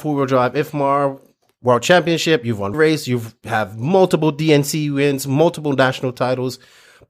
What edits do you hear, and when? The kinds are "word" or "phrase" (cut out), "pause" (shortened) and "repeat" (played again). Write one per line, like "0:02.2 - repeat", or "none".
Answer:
0:02.7 - word